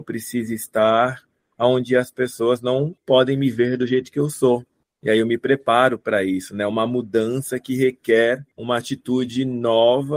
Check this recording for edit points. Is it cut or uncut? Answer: uncut